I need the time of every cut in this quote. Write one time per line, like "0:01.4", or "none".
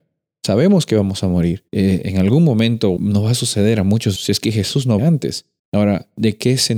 0:01.7
0:03.0
0:04.2
0:05.0
0:05.6